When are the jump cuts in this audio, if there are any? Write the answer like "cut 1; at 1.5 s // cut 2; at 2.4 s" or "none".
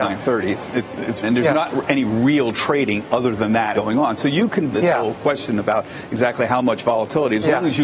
cut 1; at 1.2 s // cut 2; at 3.7 s // cut 3; at 4.7 s